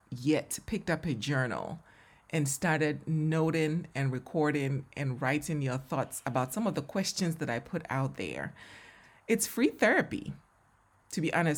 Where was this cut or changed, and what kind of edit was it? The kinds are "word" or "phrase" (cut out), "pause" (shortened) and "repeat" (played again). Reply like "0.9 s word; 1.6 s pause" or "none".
none